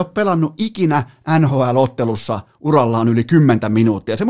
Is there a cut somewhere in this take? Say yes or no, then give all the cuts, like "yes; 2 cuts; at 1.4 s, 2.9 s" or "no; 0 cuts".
no; 0 cuts